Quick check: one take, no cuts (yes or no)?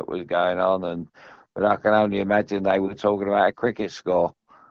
yes